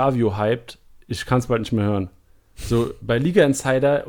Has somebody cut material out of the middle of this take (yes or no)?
no